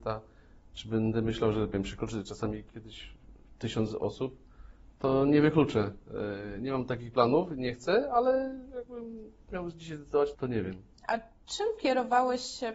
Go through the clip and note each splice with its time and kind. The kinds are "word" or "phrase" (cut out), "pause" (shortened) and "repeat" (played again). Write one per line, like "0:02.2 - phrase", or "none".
0:01.7 - word
0:10.3 - word